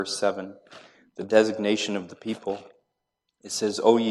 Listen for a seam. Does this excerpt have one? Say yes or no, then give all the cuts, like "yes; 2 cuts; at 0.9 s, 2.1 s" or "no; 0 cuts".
no; 0 cuts